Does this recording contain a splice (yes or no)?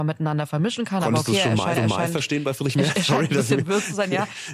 yes